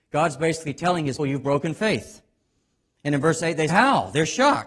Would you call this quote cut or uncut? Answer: cut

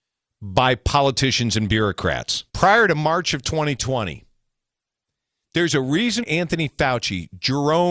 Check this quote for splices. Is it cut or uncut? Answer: cut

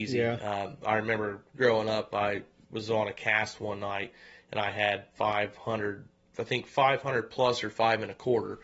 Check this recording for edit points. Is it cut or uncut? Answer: uncut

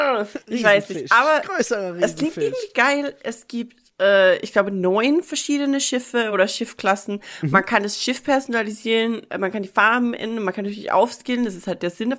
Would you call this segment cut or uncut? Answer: uncut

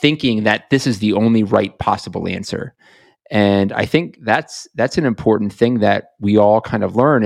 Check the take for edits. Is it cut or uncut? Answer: uncut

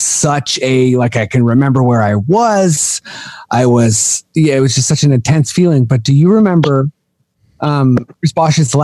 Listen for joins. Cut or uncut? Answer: uncut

